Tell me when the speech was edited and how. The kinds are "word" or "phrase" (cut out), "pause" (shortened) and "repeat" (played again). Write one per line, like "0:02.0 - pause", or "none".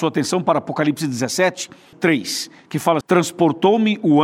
0:01.9 - word
0:03.0 - word